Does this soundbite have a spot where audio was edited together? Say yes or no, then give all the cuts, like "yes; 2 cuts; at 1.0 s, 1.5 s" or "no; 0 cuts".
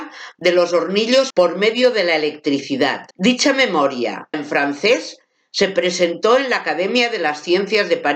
yes; 3 cuts; at 1.3 s, 3.1 s, 4.3 s